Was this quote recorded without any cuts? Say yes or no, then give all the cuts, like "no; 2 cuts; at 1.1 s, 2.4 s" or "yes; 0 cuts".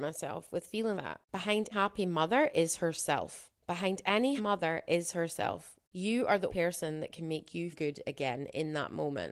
no; 6 cuts; at 0.9 s, 1.7 s, 3.6 s, 4.4 s, 6.5 s, 7.7 s